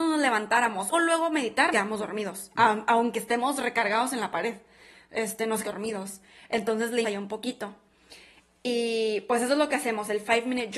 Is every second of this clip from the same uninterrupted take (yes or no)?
no